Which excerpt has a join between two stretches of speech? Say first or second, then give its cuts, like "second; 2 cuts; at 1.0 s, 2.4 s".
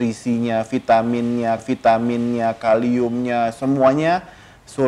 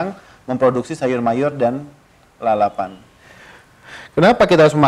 first; 1 cut; at 1.6 s